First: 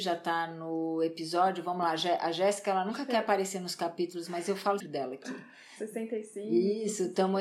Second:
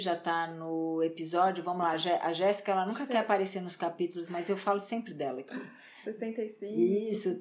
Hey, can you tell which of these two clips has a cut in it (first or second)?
first